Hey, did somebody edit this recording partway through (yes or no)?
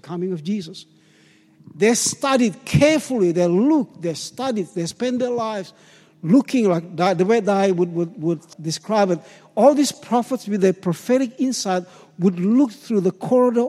yes